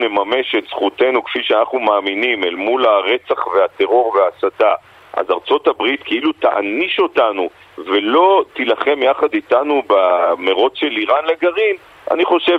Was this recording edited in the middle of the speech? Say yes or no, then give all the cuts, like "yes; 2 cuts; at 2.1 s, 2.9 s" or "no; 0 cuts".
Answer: no; 0 cuts